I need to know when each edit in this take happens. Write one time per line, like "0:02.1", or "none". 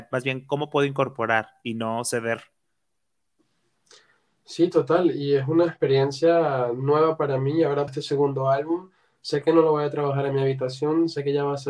0:07.9